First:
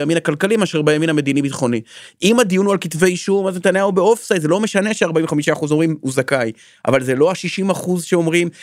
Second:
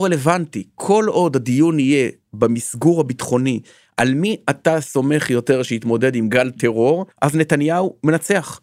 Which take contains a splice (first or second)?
second